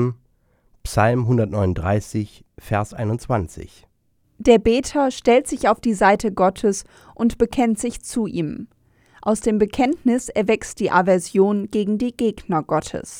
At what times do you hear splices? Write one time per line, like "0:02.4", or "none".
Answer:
none